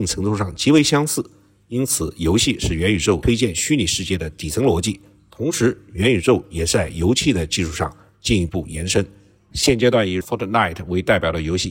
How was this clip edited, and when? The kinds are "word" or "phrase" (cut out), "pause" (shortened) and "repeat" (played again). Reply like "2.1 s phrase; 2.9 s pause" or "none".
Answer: 10.2 s word